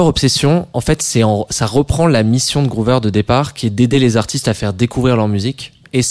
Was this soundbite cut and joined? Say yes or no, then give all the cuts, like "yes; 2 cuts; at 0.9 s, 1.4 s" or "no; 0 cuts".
no; 0 cuts